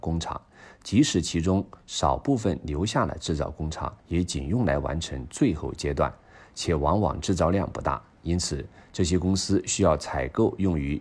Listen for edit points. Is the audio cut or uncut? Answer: cut